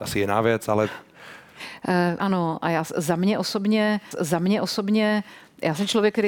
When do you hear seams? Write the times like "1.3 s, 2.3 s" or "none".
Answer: 2.2 s, 4.1 s